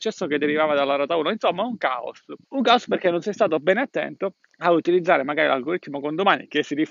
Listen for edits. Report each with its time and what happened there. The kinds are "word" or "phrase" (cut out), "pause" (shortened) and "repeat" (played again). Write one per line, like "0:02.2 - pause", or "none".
0:02.4 - pause
0:04.5 - pause